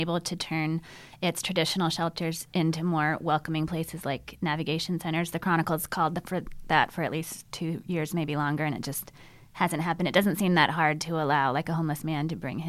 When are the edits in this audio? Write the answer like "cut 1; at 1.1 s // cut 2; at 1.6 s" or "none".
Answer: none

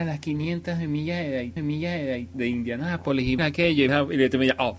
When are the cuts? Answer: cut 1; at 1.6 s // cut 2; at 3.4 s // cut 3; at 3.9 s

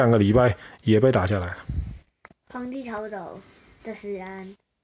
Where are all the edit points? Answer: none

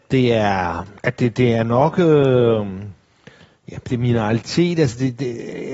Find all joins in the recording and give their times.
cut 1; at 1.0 s

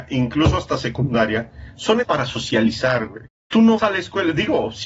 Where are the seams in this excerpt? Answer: cut 1; at 2.0 s // cut 2; at 3.3 s // cut 3; at 3.8 s

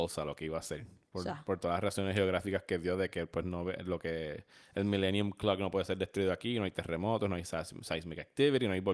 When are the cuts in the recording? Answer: none

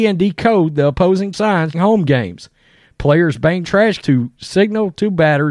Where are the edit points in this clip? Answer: cut 1; at 1.3 s // cut 2; at 1.7 s // cut 3; at 3.6 s // cut 4; at 4.0 s

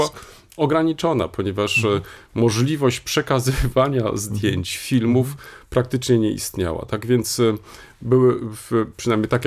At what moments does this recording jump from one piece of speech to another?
none

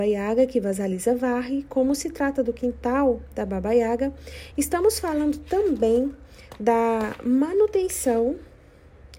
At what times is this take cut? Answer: none

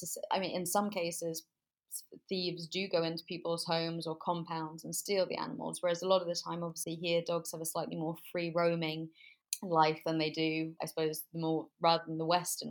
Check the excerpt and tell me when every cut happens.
cut 1; at 10.8 s // cut 2; at 11.7 s

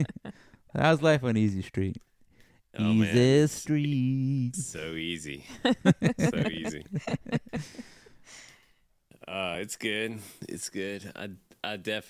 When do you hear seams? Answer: none

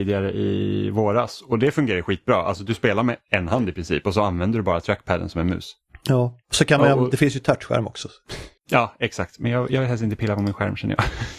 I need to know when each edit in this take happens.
cut 1; at 8.6 s

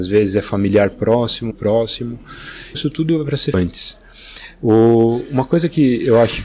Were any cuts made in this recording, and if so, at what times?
cut 1; at 1.5 s // cut 2; at 2.7 s // cut 3; at 3.5 s

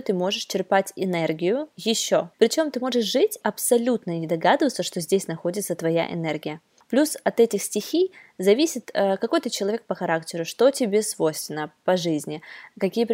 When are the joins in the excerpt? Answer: cut 1; at 3.4 s

